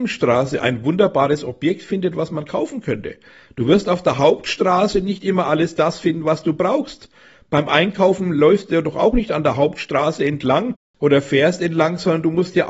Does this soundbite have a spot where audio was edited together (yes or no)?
no